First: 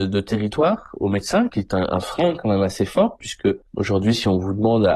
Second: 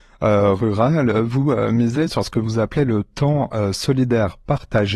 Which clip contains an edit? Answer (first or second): first